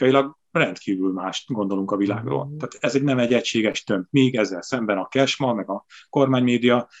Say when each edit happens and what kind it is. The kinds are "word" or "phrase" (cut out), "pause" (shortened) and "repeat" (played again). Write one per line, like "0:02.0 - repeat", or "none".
none